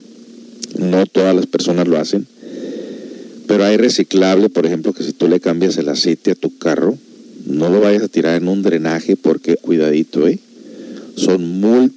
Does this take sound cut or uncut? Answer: cut